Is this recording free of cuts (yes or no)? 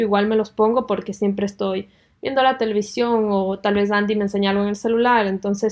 yes